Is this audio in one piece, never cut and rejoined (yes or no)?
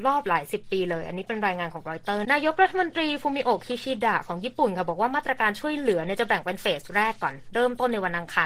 no